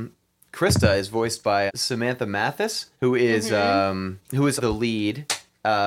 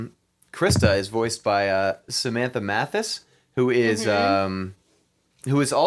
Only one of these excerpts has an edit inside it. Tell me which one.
first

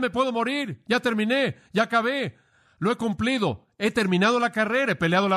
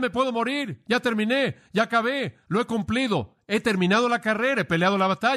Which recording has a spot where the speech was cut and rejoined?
second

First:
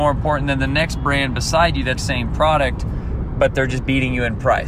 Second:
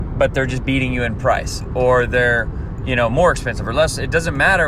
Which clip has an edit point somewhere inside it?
first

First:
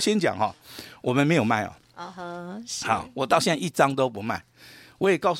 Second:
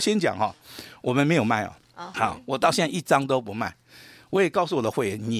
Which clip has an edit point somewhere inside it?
second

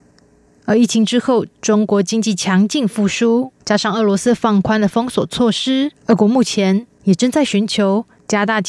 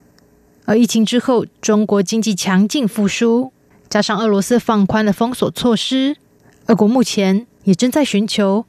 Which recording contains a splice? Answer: first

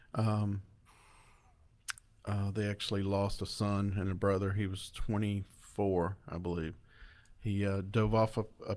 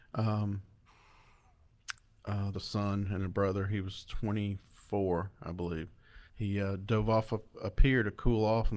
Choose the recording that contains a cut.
second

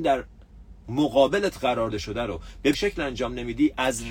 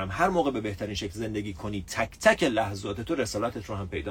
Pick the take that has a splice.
first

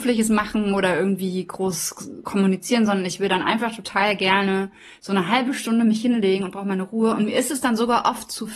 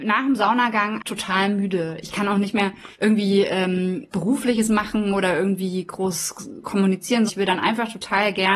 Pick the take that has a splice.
second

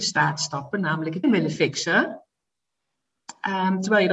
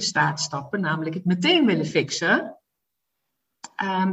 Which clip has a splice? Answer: first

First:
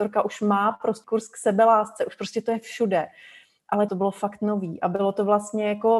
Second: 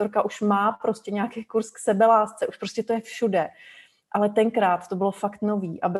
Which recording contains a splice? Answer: first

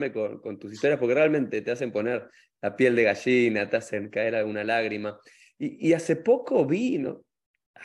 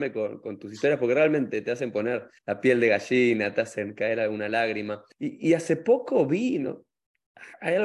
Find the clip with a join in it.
second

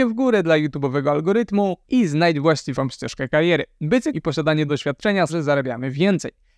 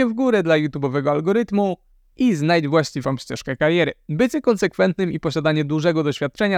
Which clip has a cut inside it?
first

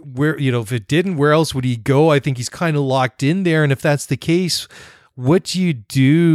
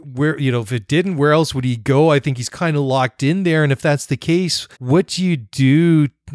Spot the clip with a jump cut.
second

